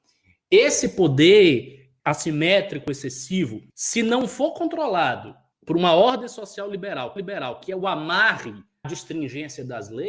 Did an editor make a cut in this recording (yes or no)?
yes